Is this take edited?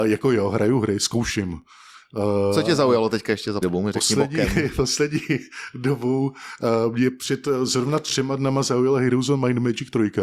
yes; 1 cut; at 3.6 s

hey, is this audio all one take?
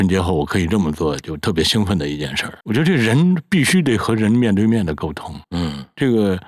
no; 2 cuts; at 2.6 s, 5.4 s

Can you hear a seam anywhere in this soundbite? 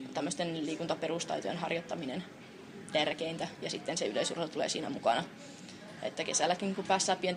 no; 0 cuts

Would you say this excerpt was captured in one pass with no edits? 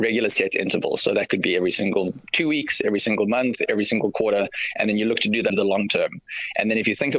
no; 1 cut; at 5.5 s

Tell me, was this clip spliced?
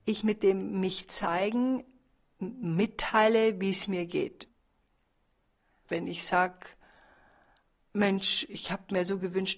no; 0 cuts

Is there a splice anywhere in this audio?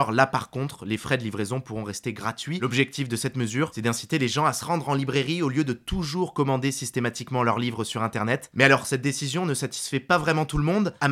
no; 0 cuts

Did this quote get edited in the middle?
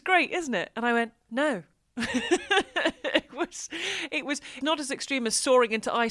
yes; 1 cut; at 4.6 s

